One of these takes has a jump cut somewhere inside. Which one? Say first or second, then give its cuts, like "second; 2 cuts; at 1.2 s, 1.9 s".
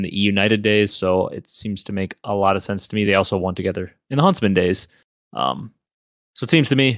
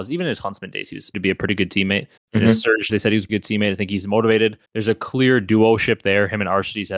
second; 5 cuts; at 1.1 s, 2.2 s, 2.9 s, 3.3 s, 4.7 s